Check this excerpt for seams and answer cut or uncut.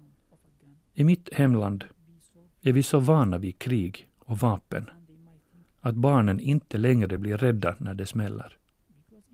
uncut